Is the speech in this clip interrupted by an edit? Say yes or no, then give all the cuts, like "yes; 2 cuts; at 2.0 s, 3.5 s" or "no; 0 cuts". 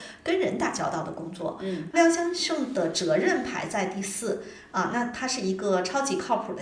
yes; 1 cut; at 1.9 s